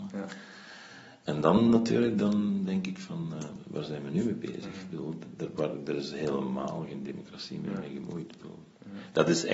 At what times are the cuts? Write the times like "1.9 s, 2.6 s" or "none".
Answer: none